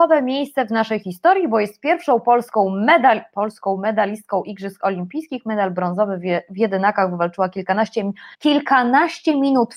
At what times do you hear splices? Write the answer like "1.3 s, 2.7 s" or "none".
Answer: 8.3 s